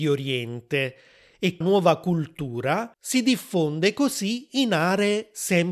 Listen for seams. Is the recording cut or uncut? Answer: cut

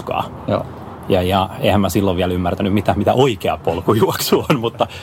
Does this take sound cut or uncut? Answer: uncut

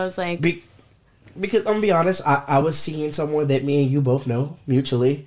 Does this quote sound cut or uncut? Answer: uncut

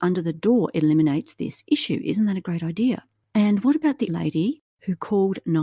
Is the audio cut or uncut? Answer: cut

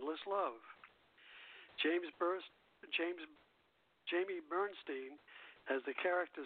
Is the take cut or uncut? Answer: uncut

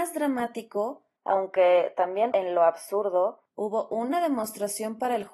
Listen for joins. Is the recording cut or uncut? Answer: cut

